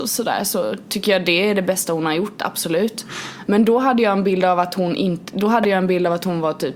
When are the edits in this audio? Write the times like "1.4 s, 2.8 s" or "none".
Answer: none